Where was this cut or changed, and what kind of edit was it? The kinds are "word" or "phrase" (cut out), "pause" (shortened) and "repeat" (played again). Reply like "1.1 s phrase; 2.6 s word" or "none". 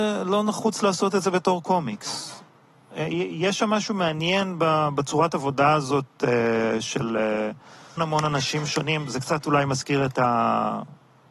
8.0 s word